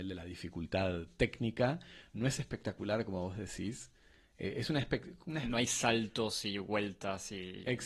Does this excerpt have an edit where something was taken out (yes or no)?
no